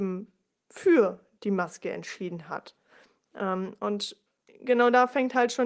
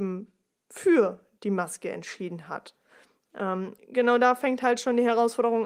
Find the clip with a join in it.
second; 1 cut; at 3.8 s

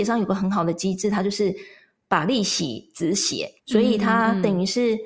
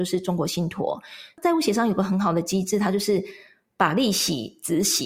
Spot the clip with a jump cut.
first; 1 cut; at 3.6 s

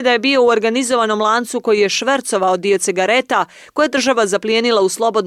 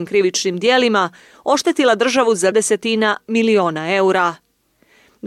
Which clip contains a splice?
second; 1 cut; at 2.5 s

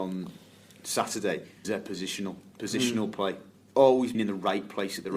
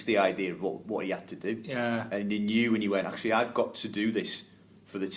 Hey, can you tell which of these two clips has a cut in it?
first; 2 cuts; at 1.6 s, 4.1 s

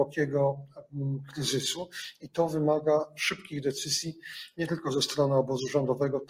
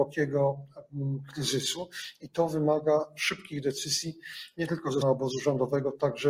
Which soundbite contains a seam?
second; 1 cut; at 5.0 s

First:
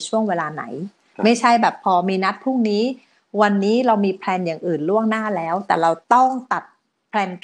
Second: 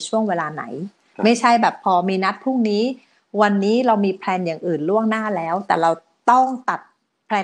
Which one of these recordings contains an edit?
first; 1 cut; at 6.0 s

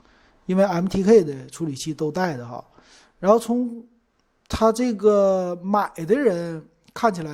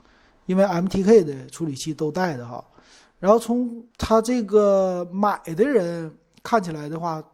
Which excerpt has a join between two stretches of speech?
second; 1 cut; at 3.9 s

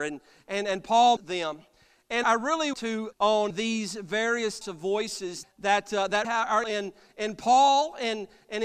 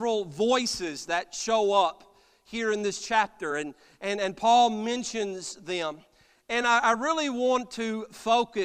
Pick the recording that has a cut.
first; 9 cuts; at 1.2 s, 2.2 s, 2.7 s, 3.1 s, 3.5 s, 4.6 s, 5.4 s, 6.2 s, 6.6 s

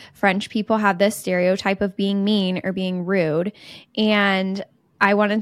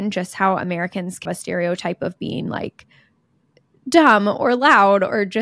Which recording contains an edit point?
second; 1 cut; at 1.3 s

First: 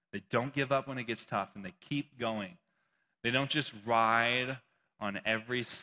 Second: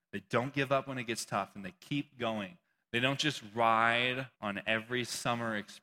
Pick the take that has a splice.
second; 2 cuts; at 2.6 s, 4.3 s

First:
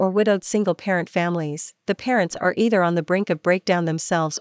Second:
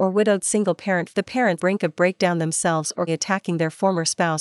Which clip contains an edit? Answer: second; 3 cuts; at 1.1 s, 1.6 s, 3.1 s

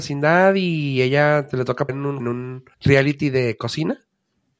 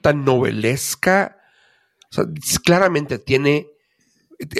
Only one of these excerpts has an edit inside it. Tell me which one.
first; 3 cuts; at 1.9 s, 2.2 s, 2.7 s

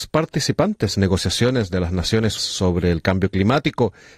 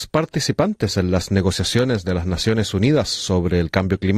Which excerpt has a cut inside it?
first; 2 cuts; at 0.9 s, 2.4 s

